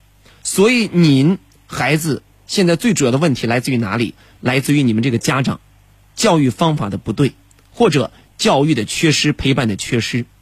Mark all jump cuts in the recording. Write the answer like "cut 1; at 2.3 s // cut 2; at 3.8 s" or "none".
none